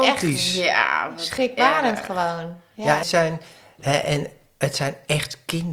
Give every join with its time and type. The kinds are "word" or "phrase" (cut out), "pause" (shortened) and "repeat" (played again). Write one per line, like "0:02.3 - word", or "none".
0:03.0 - word

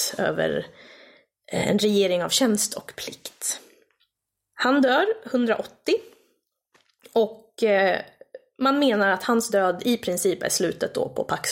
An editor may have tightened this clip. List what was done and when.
none

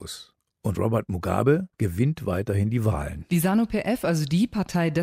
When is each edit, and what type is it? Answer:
0:01.7 - pause

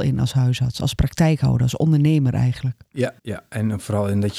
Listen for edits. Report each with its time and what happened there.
0:03.2 - pause

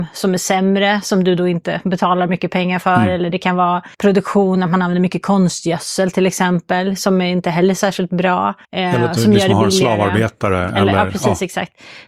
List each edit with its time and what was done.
0:03.9 - pause
0:08.6 - pause

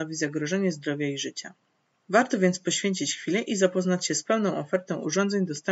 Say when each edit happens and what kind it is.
none

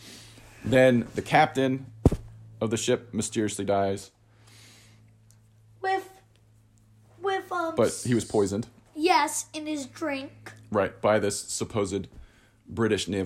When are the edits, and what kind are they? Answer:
none

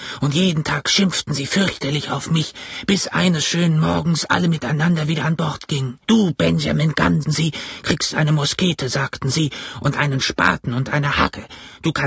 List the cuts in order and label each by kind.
0:06.0 - pause
0:07.2 - word

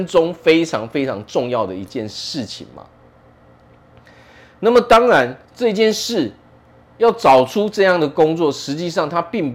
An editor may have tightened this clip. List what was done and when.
0:05.4 - pause

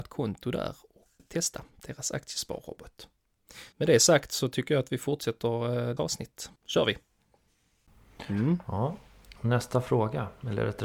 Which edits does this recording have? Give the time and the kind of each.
0:01.2 - word
0:03.7 - pause
0:06.0 - word
0:06.6 - pause

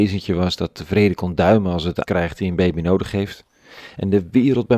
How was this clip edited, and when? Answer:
0:02.0 - word

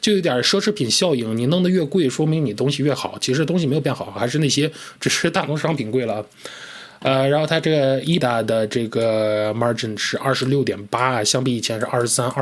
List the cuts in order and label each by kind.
0:08.2 - word

